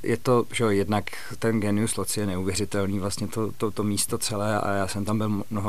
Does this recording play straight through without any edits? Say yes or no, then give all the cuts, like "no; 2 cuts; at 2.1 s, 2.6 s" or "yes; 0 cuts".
yes; 0 cuts